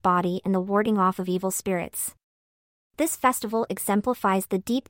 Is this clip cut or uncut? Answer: uncut